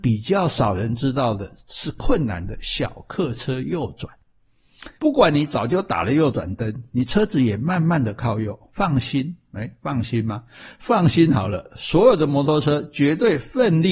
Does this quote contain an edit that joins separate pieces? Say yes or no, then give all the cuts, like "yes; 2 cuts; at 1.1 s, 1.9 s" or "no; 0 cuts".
yes; 1 cut; at 5.0 s